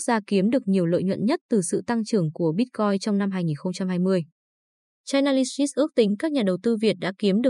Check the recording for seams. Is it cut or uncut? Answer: uncut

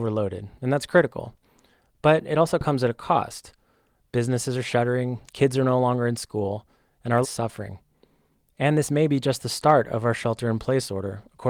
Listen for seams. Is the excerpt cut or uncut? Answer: cut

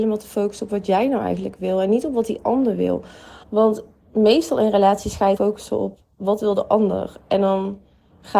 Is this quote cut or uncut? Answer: cut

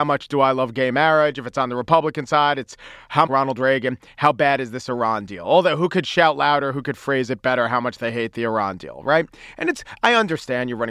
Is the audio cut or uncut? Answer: cut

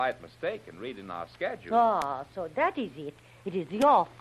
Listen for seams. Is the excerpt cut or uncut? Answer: uncut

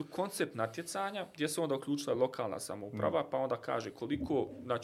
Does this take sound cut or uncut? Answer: uncut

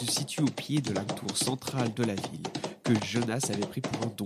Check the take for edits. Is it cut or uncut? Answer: cut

